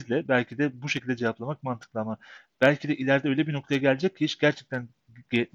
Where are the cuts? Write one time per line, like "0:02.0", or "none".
none